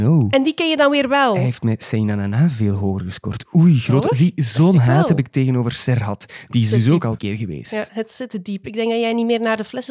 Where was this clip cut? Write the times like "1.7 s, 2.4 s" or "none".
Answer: 7.2 s